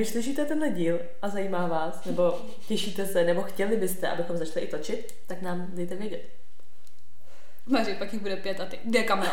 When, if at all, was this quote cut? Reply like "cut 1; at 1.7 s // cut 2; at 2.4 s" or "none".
none